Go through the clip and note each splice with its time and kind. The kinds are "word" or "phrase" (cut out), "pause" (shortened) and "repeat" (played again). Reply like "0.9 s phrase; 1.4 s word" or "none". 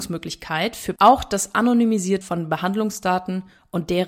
1.0 s word; 2.2 s word